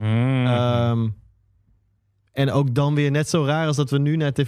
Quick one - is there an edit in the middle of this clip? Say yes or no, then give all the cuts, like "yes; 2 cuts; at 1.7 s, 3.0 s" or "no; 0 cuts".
no; 0 cuts